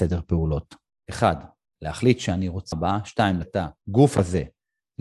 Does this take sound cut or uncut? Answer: cut